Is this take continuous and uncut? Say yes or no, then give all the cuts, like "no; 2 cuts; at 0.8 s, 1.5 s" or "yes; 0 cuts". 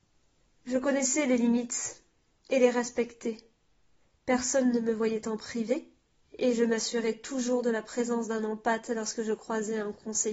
yes; 0 cuts